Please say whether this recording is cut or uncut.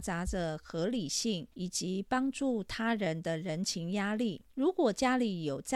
cut